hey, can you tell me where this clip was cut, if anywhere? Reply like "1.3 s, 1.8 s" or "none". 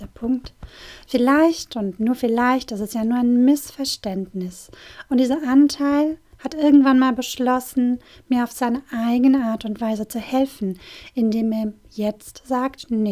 none